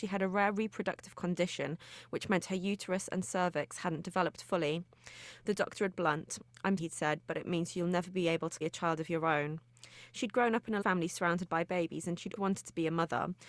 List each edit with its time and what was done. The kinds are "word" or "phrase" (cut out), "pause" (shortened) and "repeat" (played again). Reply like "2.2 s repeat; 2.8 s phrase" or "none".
5.9 s word; 6.8 s word; 8.6 s word; 10.8 s word; 12.4 s word